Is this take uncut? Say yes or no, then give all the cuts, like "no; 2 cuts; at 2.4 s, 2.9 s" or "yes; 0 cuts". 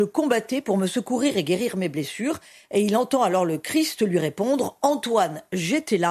yes; 0 cuts